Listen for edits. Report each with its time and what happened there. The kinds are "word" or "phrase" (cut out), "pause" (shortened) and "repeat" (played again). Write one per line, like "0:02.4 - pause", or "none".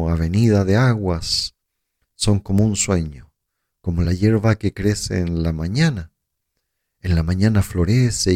none